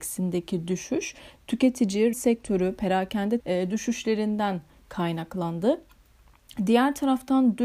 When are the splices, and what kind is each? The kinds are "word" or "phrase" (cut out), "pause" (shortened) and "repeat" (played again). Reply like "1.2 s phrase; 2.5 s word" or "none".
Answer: 2.1 s phrase; 3.4 s phrase